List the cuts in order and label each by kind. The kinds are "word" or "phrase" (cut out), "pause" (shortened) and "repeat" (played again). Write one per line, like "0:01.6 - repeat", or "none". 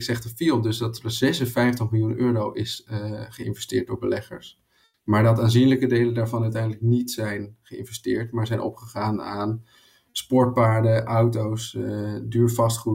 none

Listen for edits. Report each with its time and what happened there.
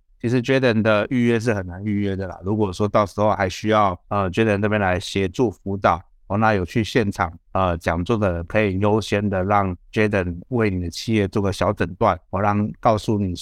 0:04.0 - pause
0:07.5 - pause
0:09.8 - pause
0:12.3 - pause

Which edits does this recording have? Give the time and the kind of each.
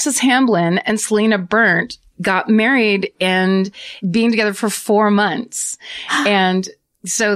0:02.1 - word
0:04.0 - word

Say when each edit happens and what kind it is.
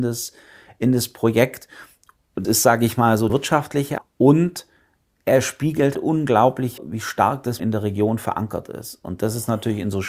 0:02.4 - word
0:03.3 - word
0:04.0 - word
0:05.9 - word
0:06.8 - word
0:07.6 - word

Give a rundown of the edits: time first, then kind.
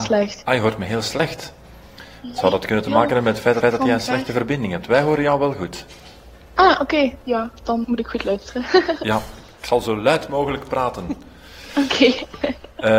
0:03.6 - repeat
0:07.8 - word

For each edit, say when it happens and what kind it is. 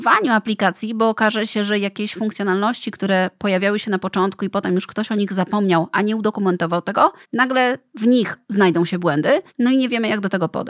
0:07.2 - pause
0:08.4 - pause
0:09.5 - pause

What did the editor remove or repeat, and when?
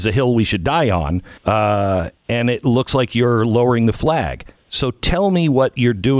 0:01.4 - pause

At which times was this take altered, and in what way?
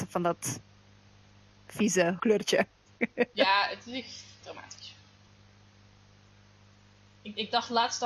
0:02.2 - phrase
0:04.4 - word

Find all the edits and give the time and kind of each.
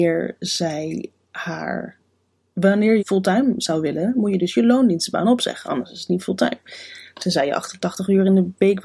0:03.0 - word

